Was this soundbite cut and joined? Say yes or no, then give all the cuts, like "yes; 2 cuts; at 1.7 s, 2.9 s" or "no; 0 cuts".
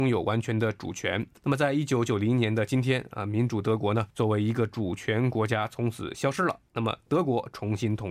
yes; 2 cuts; at 1.4 s, 4.1 s